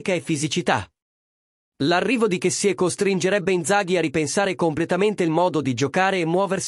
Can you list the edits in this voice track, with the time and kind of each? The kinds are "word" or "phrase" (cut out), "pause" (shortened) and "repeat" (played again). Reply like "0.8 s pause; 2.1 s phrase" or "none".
none